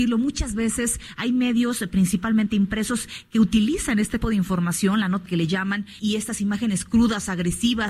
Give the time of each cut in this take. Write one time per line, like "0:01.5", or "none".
0:04.2
0:05.3
0:06.0